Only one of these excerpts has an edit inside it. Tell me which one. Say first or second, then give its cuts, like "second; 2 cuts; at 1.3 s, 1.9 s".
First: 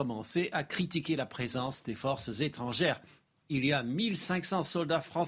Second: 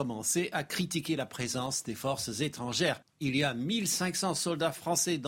second; 1 cut; at 3.0 s